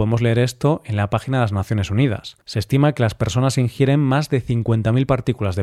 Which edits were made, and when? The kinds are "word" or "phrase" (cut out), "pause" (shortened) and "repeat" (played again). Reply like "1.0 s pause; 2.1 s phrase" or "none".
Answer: 2.4 s pause

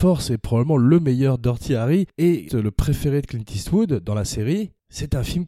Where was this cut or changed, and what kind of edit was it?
2.5 s word

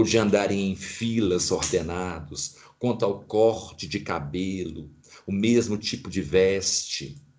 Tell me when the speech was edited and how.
none

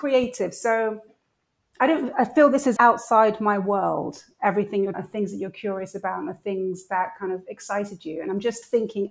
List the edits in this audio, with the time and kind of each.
2.8 s word; 4.9 s phrase

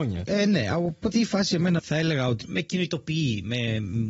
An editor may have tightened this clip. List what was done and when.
1.1 s word; 1.8 s word; 2.4 s word

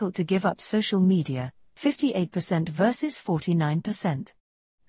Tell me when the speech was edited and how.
none

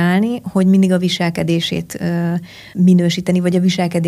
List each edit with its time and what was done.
2.7 s word

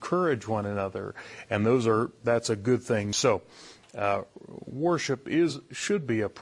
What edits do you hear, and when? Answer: none

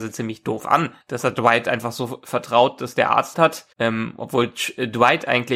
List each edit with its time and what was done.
1.0 s pause; 3.3 s phrase; 3.7 s pause

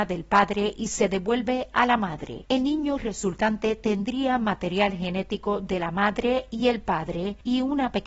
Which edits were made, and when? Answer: none

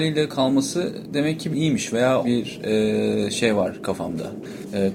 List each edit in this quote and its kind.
1.5 s phrase; 2.2 s phrase

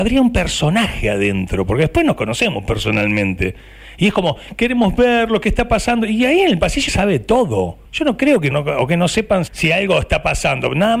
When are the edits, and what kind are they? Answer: 6.9 s word; 7.8 s pause; 8.5 s phrase; 9.5 s word

